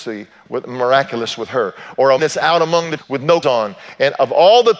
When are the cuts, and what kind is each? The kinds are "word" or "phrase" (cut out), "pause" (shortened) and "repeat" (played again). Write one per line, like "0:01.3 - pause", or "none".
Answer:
0:02.2 - word
0:03.0 - word
0:03.4 - word